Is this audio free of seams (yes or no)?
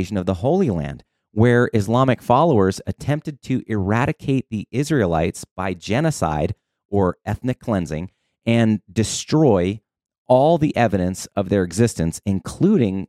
yes